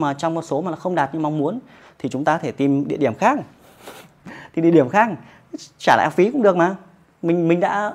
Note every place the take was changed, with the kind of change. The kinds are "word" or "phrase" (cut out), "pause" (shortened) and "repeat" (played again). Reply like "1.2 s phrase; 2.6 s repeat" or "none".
none